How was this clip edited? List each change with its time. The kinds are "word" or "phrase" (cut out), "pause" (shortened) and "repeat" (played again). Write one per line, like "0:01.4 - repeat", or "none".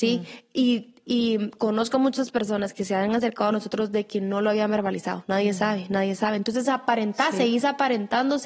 none

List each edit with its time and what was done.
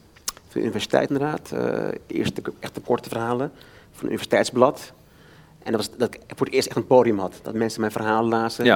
0:01.1 - word

